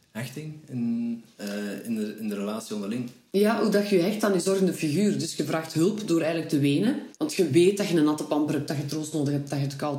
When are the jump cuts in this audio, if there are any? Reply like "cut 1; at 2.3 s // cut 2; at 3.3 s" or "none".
cut 1; at 7.2 s